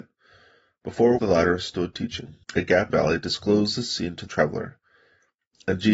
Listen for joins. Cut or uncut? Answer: cut